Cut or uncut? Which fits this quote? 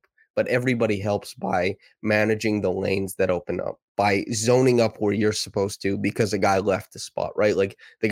cut